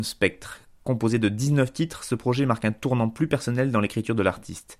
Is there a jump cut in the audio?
no; 0 cuts

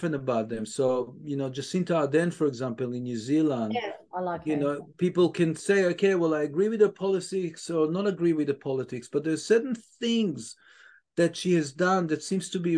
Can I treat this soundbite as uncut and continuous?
yes; 0 cuts

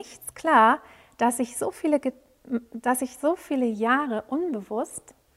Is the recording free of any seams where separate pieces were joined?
yes; 0 cuts

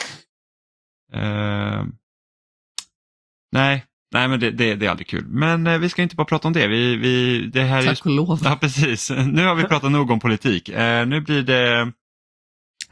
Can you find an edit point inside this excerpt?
no; 0 cuts

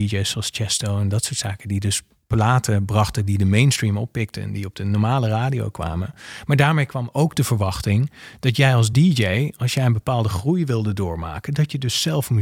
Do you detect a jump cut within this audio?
no; 0 cuts

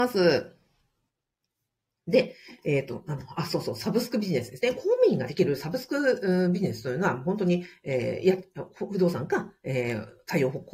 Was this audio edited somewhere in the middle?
no; 0 cuts

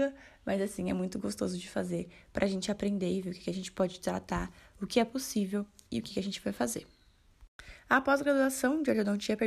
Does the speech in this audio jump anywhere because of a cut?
no; 0 cuts

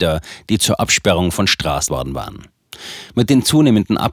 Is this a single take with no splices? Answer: no; 1 cut; at 1.9 s

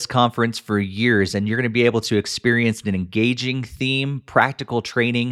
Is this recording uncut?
yes; 0 cuts

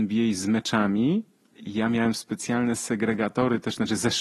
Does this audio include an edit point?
yes; 1 cut; at 1.6 s

